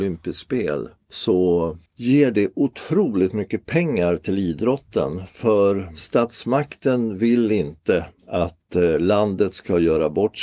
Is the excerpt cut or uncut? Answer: cut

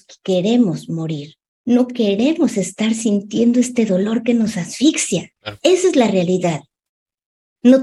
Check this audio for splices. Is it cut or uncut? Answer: cut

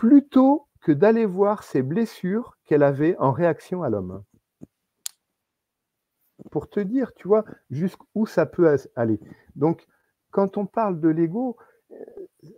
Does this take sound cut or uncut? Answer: uncut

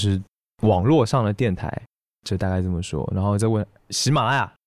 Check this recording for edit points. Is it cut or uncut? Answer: uncut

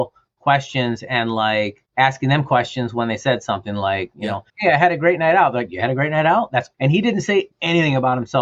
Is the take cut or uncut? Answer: cut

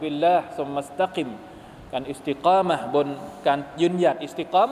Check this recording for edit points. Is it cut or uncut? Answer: uncut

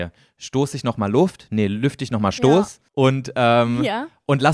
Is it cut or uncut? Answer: cut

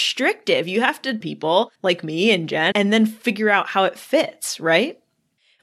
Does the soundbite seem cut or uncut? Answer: cut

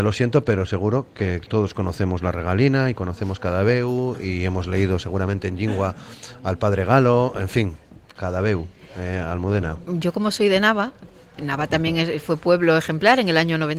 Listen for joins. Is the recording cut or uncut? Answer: uncut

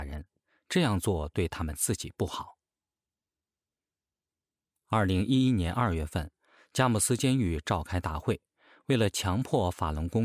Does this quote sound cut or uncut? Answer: uncut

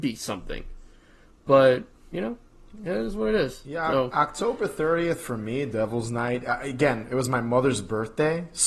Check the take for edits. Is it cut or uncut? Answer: uncut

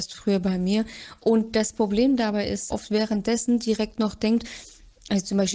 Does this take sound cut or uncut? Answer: cut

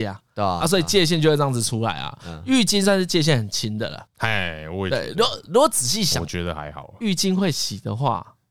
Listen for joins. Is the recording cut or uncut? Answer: cut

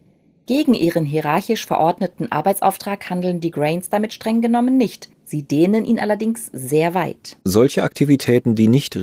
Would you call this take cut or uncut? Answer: cut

